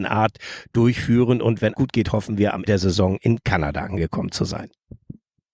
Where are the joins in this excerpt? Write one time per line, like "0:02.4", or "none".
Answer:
0:01.7
0:02.7